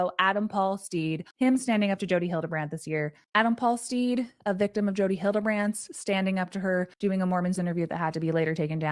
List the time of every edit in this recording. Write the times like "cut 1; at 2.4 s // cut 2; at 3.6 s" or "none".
cut 1; at 1.3 s // cut 2; at 6.9 s // cut 3; at 7.6 s